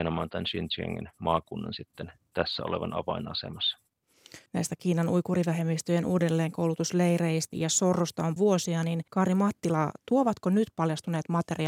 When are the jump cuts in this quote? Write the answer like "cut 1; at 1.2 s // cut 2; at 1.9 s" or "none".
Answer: cut 1; at 4.5 s // cut 2; at 7.5 s // cut 3; at 8.4 s // cut 4; at 9.1 s